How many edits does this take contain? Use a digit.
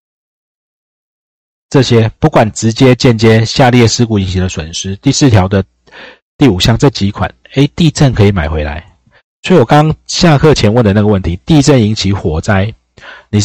0